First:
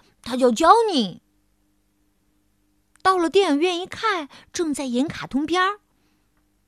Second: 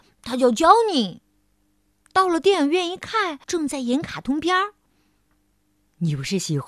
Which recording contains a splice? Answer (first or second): second